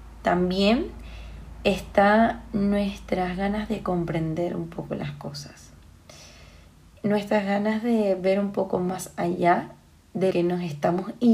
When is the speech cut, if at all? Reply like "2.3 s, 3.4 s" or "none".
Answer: 10.3 s